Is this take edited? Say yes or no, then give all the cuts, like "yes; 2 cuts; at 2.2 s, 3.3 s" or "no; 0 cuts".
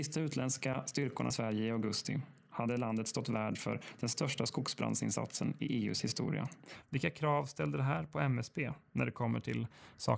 yes; 1 cut; at 1.3 s